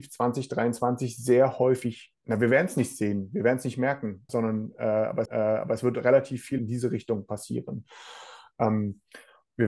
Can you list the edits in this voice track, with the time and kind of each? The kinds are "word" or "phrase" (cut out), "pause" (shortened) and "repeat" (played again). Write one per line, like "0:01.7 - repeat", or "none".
0:02.2 - pause
0:04.3 - word
0:05.3 - repeat
0:06.6 - phrase